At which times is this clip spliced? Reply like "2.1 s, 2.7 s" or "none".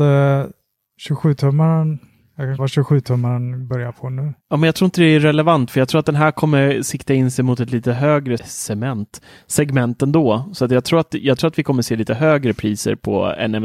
2.6 s, 4.4 s, 8.4 s